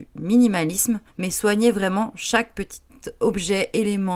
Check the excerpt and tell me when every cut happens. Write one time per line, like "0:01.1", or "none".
0:01.1